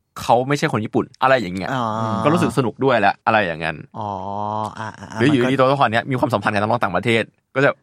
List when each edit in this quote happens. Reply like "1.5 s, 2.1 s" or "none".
1.1 s, 3.2 s